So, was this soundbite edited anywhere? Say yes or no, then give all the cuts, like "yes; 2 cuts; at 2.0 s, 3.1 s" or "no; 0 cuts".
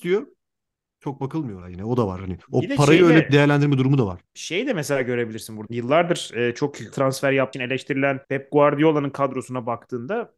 yes; 7 cuts; at 1.6 s, 2.4 s, 4.2 s, 5.7 s, 6.9 s, 7.5 s, 8.2 s